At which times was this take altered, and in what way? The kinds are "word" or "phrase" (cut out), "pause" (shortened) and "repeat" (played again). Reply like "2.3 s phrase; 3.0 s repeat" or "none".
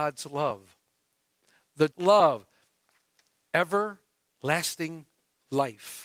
1.9 s phrase